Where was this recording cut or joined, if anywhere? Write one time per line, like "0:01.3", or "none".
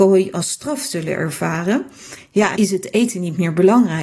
0:02.6